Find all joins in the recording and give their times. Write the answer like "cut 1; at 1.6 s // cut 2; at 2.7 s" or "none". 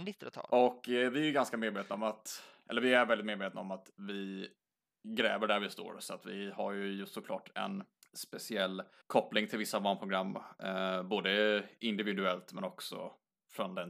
none